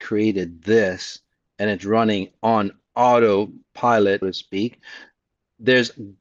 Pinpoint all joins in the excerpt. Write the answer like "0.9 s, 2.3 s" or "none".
4.2 s